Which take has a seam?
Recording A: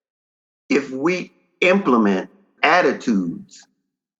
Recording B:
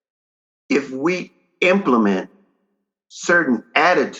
A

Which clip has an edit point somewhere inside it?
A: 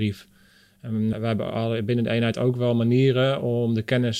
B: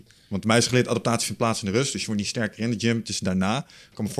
A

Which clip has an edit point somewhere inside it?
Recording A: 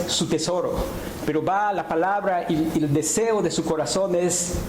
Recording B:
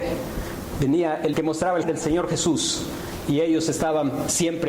B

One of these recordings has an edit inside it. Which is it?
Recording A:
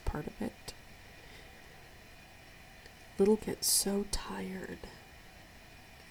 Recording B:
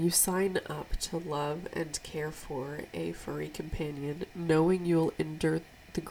A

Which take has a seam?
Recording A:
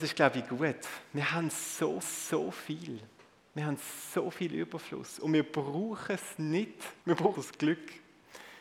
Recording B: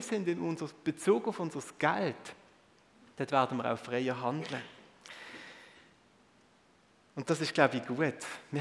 A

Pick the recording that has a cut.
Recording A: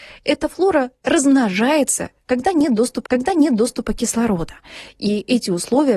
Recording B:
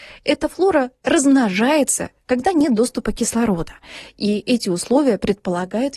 A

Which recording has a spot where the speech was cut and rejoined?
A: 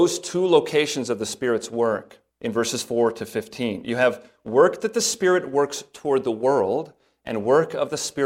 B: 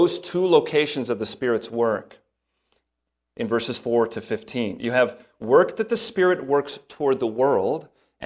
A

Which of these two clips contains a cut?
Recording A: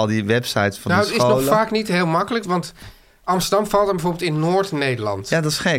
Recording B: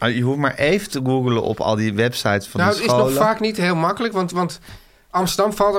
A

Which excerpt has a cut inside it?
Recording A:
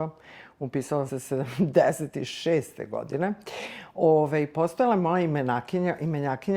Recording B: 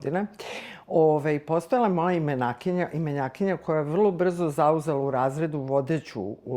A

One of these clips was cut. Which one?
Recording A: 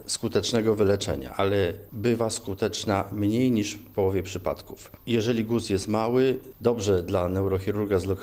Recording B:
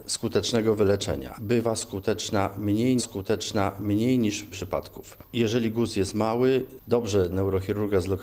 B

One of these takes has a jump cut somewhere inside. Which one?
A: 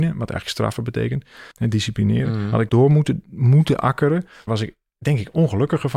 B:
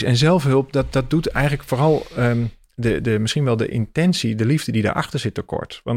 A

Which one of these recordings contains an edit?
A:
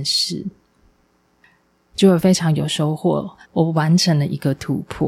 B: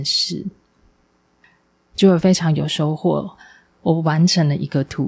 A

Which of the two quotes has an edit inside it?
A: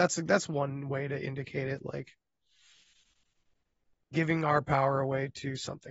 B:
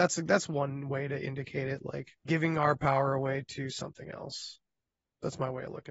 B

